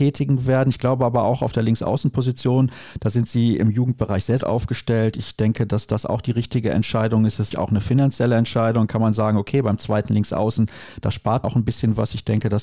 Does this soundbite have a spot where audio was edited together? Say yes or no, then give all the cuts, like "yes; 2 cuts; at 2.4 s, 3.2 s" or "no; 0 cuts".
yes; 3 cuts; at 4.4 s, 7.5 s, 11.4 s